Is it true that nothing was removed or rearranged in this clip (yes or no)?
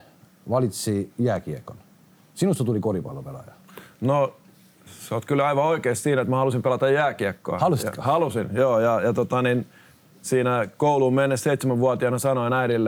yes